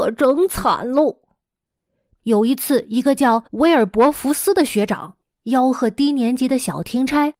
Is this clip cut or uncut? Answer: cut